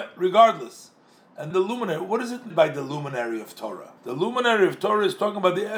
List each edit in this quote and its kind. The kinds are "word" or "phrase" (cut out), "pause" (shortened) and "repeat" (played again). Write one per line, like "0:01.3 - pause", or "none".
0:01.5 - word
0:02.5 - word
0:04.0 - pause